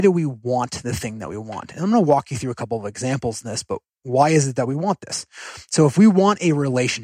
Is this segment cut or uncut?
uncut